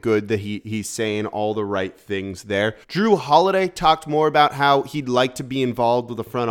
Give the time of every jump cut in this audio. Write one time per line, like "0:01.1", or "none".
0:02.8